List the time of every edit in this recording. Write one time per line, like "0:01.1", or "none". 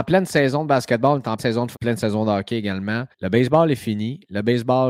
0:01.4
0:01.7
0:03.1